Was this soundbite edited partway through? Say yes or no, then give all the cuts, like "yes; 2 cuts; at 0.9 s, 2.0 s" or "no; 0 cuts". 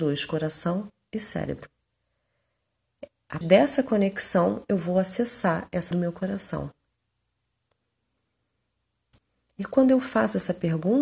yes; 2 cuts; at 3.4 s, 5.9 s